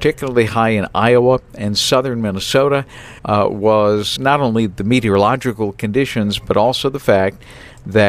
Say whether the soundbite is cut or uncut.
cut